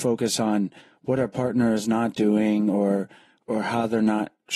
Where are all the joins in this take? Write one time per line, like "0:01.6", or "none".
none